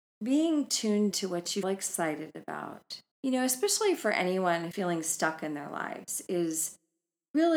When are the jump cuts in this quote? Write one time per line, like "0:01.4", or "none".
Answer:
0:01.1
0:01.6
0:03.1
0:04.7